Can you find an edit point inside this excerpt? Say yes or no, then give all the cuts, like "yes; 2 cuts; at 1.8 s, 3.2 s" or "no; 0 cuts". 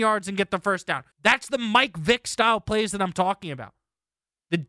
yes; 1 cut; at 1.1 s